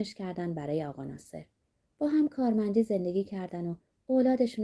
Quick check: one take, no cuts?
yes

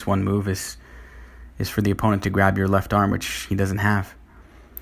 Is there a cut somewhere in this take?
no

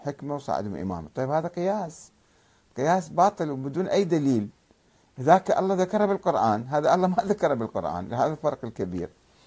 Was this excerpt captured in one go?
yes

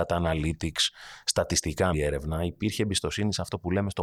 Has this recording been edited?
yes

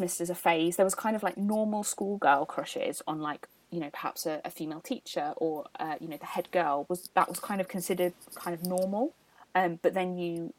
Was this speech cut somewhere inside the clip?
no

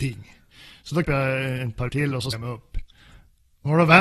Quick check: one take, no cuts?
no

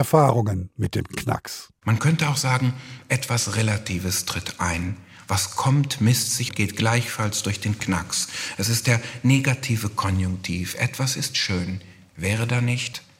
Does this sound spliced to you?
yes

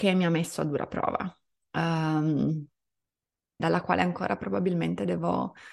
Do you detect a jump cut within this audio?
yes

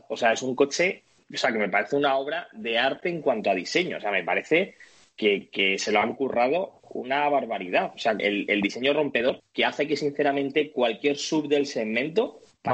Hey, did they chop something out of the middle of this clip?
yes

